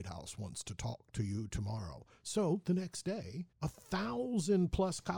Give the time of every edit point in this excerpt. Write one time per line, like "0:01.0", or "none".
0:03.5